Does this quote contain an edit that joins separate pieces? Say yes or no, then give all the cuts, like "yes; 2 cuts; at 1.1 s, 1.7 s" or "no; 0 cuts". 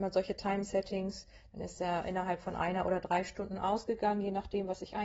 no; 0 cuts